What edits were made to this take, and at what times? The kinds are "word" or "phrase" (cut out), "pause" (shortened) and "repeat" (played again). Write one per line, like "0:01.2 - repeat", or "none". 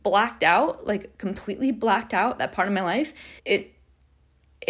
0:03.4 - pause